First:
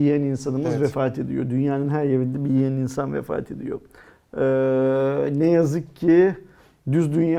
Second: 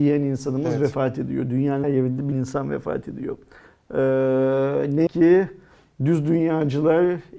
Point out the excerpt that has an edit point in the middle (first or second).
second